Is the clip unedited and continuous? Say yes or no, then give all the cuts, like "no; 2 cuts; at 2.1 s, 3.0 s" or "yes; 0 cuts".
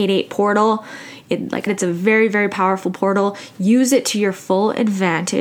no; 1 cut; at 1.7 s